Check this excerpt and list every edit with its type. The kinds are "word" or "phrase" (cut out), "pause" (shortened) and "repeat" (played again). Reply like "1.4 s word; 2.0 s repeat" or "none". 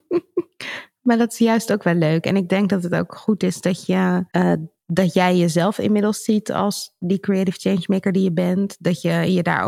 4.3 s pause